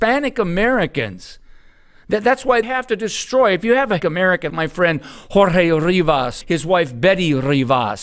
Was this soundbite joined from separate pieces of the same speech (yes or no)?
yes